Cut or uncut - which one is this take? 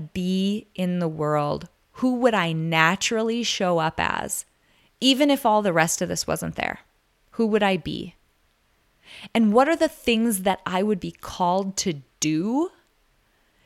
uncut